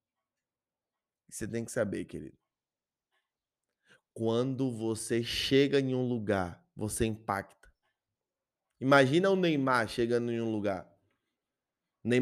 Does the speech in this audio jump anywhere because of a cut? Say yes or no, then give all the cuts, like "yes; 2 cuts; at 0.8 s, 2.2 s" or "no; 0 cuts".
no; 0 cuts